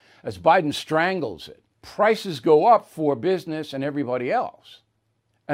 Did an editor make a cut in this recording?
yes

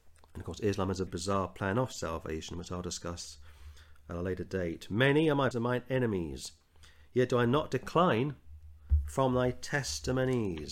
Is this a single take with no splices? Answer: no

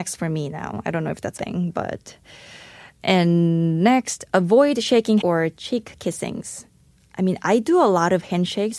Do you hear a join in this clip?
yes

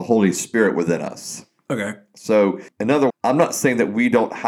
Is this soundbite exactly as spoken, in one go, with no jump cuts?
no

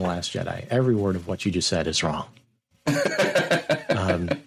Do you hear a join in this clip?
no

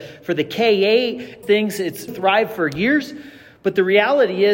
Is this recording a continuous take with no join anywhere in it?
no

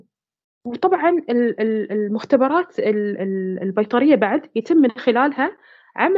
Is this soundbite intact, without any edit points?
yes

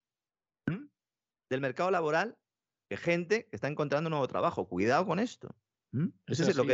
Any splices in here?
no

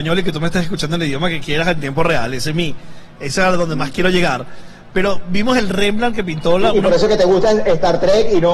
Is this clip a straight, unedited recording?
yes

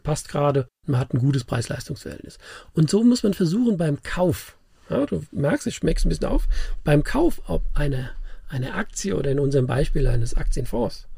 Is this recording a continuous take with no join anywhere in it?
yes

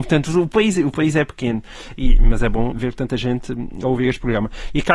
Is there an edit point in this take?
yes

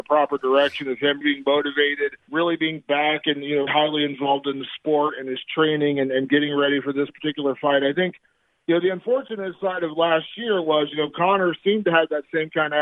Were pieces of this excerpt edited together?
yes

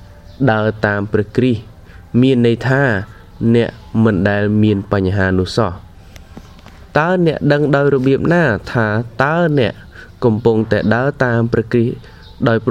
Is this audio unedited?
yes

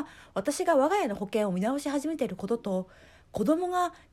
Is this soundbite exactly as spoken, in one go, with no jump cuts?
yes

